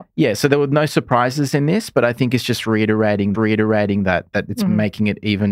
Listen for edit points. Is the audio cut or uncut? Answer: cut